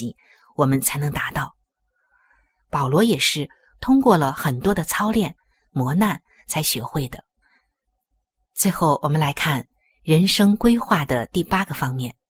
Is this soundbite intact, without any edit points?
yes; 0 cuts

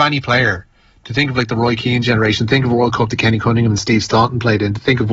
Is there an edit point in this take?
no; 0 cuts

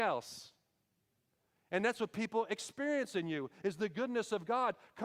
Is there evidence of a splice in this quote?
no; 0 cuts

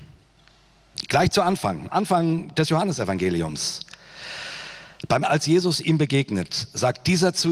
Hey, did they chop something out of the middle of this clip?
yes; 2 cuts; at 1.9 s, 5.2 s

